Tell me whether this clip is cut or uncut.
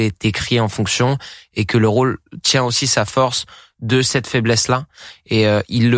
uncut